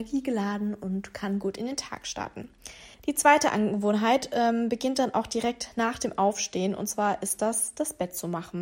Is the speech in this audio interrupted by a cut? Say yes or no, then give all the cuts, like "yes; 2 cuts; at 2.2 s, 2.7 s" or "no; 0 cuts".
yes; 1 cut; at 2.9 s